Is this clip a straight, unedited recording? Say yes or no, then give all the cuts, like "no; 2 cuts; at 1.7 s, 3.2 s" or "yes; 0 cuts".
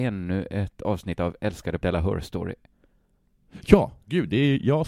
no; 1 cut; at 1.8 s